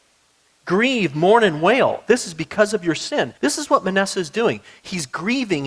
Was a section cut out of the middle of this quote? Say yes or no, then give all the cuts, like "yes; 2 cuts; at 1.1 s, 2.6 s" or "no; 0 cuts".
yes; 1 cut; at 3.4 s